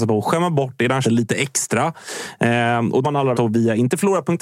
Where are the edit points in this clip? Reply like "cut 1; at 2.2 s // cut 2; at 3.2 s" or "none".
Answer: cut 1; at 1.0 s // cut 2; at 3.0 s // cut 3; at 3.3 s